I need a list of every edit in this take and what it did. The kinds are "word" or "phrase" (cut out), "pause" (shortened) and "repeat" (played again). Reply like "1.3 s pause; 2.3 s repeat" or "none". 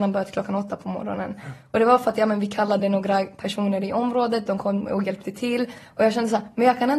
none